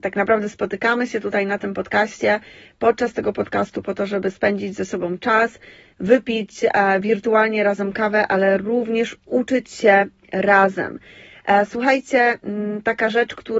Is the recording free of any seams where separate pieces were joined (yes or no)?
yes